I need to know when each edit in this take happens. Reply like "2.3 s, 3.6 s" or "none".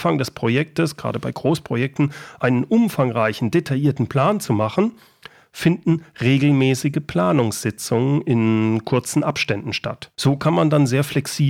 10.1 s